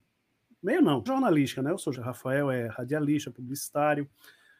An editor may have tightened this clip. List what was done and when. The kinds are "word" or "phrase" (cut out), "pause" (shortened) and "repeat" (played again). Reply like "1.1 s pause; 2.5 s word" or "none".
1.1 s word; 1.9 s word